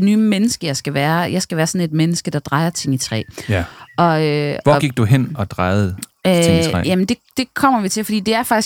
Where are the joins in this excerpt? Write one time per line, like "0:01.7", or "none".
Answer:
none